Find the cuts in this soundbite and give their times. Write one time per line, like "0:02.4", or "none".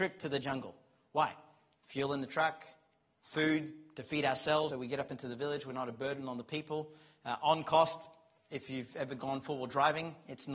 0:04.7